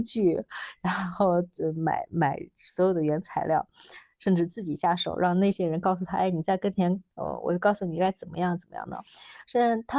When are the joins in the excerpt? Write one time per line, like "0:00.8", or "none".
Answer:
0:07.1
0:09.1